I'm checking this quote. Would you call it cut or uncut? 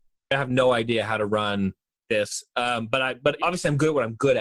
cut